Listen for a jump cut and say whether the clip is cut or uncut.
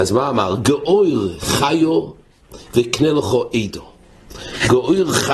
uncut